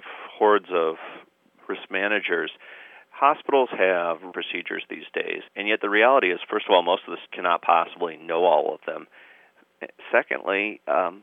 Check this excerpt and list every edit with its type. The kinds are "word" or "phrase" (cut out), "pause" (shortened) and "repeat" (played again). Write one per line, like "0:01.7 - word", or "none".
0:01.6 - word
0:04.3 - phrase
0:05.5 - pause
0:07.3 - word